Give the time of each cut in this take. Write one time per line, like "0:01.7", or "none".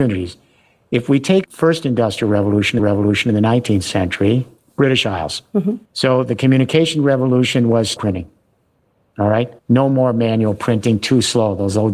0:01.4
0:02.8
0:04.6
0:05.9
0:08.0
0:09.6